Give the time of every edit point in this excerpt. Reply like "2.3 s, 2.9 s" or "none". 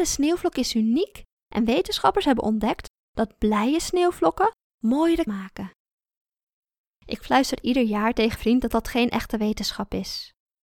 5.3 s, 8.4 s